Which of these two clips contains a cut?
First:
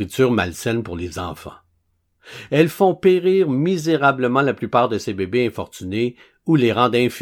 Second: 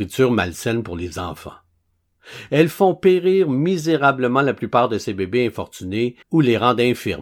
second; 1 cut; at 6.2 s

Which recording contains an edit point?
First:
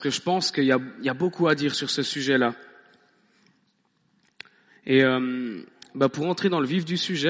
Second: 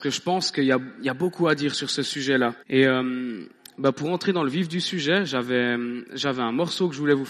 second; 1 cut; at 2.6 s

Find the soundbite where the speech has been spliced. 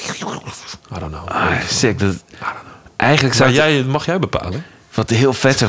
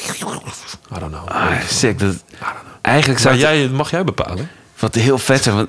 second; 1 cut; at 2.8 s

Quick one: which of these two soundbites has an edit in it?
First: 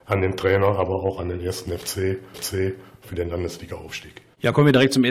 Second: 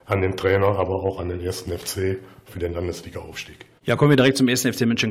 first; 1 cut; at 2.3 s

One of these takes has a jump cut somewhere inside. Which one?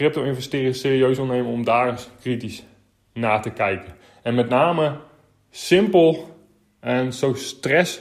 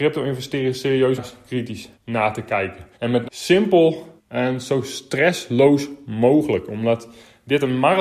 second; 5 cuts; at 1.2 s, 1.9 s, 2.9 s, 3.2 s, 4.2 s

